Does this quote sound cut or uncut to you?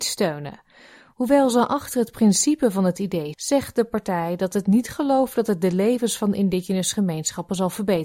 cut